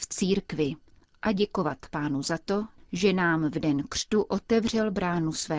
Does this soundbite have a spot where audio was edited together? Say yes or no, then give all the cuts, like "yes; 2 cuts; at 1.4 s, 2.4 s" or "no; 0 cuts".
no; 0 cuts